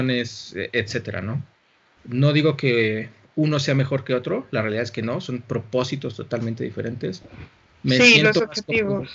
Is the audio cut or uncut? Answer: uncut